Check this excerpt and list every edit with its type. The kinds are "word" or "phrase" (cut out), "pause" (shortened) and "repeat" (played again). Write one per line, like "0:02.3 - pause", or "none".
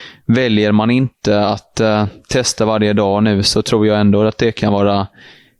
none